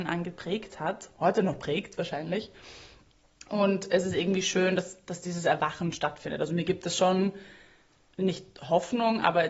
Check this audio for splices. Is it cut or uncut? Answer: uncut